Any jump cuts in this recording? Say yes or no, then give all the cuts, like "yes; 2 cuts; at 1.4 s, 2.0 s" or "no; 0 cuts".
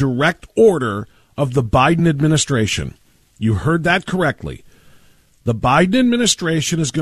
no; 0 cuts